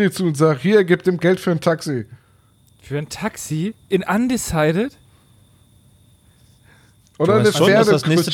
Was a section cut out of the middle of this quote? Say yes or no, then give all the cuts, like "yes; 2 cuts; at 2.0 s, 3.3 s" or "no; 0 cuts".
yes; 2 cuts; at 1.2 s, 3.8 s